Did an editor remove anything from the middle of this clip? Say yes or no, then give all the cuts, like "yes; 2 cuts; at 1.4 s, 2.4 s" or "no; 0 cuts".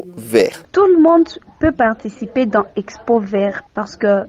no; 0 cuts